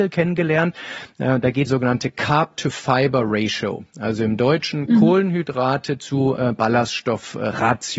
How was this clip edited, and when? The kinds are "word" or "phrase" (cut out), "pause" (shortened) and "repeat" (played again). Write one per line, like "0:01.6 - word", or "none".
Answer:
0:01.7 - phrase